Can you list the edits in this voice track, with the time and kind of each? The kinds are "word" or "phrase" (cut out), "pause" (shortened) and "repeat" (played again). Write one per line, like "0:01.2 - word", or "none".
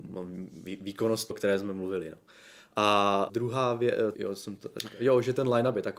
0:01.3 - word
0:03.3 - word
0:04.1 - word
0:04.6 - word